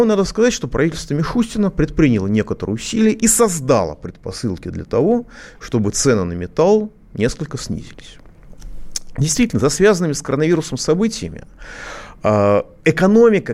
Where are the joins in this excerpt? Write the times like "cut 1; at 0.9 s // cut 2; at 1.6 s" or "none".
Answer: none